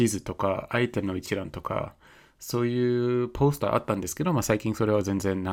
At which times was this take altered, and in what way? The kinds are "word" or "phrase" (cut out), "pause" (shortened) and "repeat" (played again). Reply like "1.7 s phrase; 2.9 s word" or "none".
none